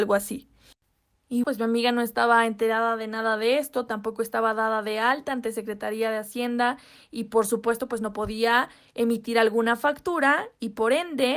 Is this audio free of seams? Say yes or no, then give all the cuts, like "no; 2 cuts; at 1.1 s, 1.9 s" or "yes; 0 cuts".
no; 1 cut; at 1.4 s